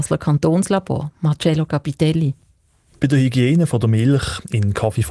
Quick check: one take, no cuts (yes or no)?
yes